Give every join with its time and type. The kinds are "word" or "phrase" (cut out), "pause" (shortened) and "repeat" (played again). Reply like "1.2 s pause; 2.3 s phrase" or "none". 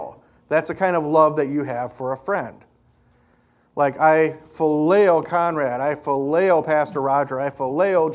none

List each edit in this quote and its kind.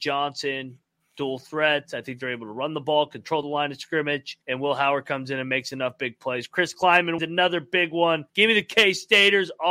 3.4 s phrase; 4.4 s pause; 7.2 s word; 8.3 s pause

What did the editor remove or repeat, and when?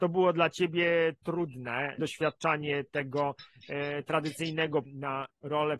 2.0 s word; 4.8 s word

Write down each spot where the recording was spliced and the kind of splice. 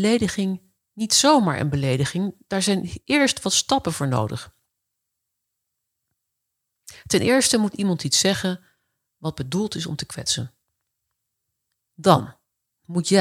none

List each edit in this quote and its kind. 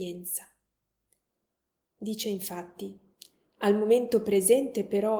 none

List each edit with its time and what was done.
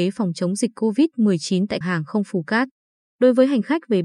1.8 s word

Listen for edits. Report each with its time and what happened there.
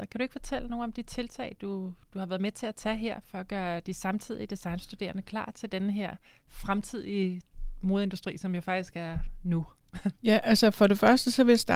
none

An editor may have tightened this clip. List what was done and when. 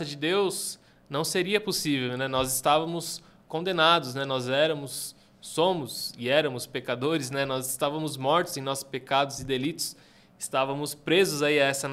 none

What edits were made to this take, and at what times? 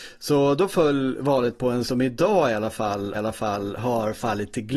1.8 s word; 3.1 s repeat

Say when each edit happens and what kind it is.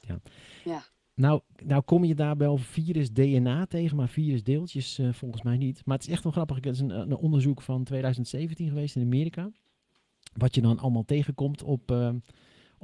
none

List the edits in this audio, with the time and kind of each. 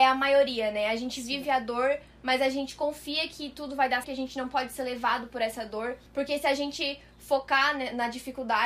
4.0 s word; 6.1 s pause

